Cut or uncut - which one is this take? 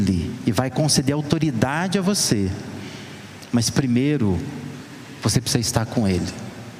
uncut